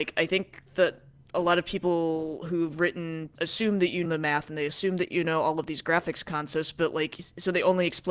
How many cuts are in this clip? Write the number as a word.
two